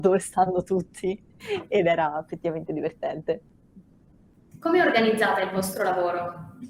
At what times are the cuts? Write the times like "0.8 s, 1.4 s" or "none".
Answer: none